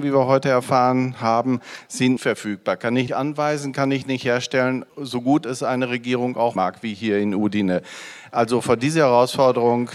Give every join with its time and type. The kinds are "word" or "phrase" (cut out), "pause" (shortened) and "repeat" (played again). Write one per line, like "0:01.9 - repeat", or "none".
0:02.2 - word
0:03.1 - word
0:04.9 - pause
0:06.6 - word